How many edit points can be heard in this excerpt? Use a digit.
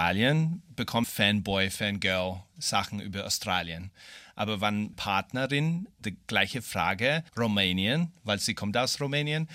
4